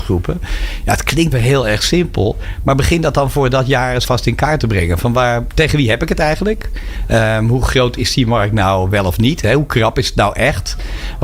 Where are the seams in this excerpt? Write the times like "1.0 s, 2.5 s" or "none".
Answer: 1.3 s, 4.0 s